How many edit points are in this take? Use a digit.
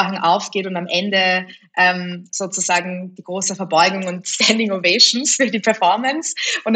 0